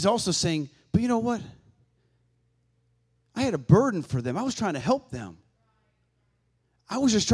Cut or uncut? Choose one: uncut